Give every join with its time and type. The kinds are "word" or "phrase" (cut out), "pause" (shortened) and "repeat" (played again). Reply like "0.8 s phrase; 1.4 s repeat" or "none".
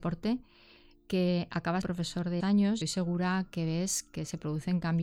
1.8 s word; 2.4 s phrase; 2.8 s word